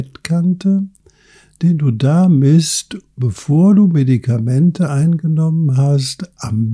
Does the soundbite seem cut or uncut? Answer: uncut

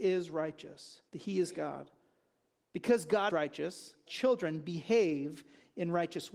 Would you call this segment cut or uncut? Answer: cut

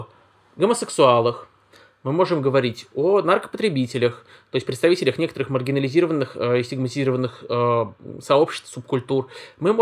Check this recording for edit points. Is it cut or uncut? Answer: uncut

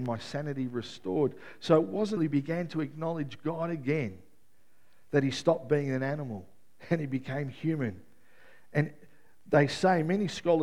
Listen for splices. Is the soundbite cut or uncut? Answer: cut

